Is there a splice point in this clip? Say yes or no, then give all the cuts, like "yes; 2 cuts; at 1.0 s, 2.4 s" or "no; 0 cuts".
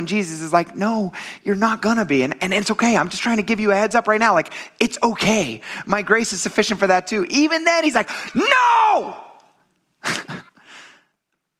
yes; 1 cut; at 10.5 s